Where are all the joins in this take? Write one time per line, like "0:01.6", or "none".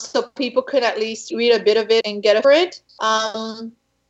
0:01.3
0:02.0
0:02.4
0:02.9